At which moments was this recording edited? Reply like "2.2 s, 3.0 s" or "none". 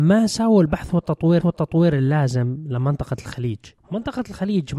1.4 s, 3.8 s